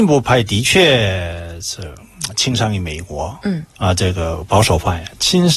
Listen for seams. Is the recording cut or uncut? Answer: cut